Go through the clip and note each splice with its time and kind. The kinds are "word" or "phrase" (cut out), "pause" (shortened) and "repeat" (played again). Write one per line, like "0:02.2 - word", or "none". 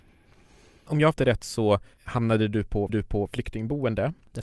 0:01.1 - word
0:01.9 - pause
0:02.9 - repeat